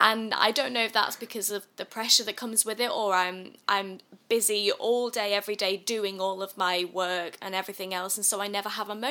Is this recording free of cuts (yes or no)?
yes